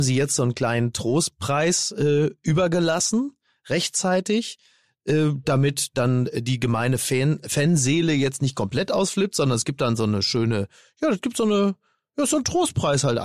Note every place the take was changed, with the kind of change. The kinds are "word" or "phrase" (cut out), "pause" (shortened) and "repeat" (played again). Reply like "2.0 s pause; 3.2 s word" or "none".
none